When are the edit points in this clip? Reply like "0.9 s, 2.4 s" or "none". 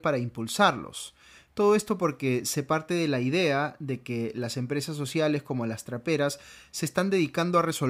none